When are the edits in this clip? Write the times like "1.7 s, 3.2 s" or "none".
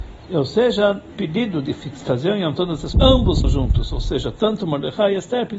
1.1 s, 2.5 s, 2.9 s, 3.4 s